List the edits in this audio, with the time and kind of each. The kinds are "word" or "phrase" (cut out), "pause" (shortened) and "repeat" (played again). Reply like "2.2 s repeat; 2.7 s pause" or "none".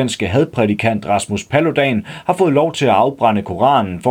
none